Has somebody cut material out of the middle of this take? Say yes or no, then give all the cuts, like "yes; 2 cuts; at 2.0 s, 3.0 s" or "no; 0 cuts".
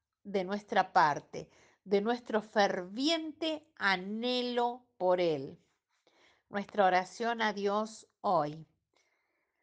no; 0 cuts